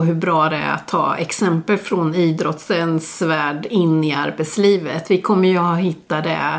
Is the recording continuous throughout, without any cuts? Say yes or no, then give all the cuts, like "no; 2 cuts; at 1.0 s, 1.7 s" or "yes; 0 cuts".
yes; 0 cuts